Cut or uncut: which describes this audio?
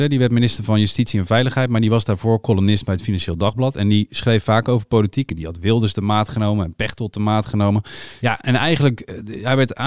uncut